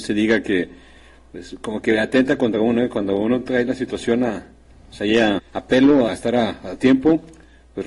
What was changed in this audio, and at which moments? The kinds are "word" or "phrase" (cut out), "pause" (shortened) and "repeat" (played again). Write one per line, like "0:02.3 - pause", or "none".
0:05.4 - word
0:06.1 - word